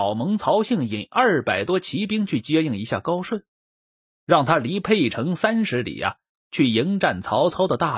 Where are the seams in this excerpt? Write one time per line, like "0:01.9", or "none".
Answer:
none